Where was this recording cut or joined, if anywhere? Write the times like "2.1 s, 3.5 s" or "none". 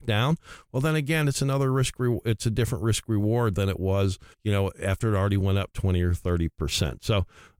4.3 s